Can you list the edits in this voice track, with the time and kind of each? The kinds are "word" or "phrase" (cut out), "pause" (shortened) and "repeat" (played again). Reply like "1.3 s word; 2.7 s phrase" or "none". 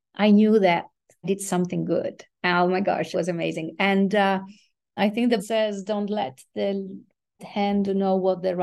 1.2 s word; 3.1 s word; 5.0 s word; 5.4 s word; 7.4 s word